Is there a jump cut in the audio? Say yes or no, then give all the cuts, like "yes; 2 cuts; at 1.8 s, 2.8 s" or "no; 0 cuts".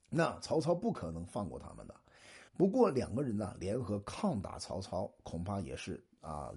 yes; 1 cut; at 2.5 s